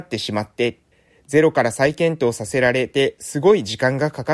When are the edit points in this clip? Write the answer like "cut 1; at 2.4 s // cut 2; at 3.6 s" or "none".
cut 1; at 0.9 s